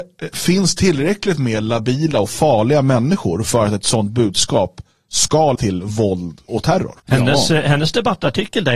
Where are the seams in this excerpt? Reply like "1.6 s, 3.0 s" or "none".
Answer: 5.6 s, 6.5 s, 7.0 s